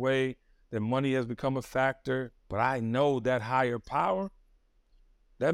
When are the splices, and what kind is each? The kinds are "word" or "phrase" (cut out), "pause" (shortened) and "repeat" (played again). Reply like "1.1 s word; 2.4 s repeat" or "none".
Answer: 2.4 s pause